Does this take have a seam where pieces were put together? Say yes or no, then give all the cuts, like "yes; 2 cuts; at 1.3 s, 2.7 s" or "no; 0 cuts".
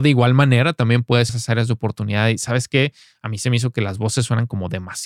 yes; 1 cut; at 1.3 s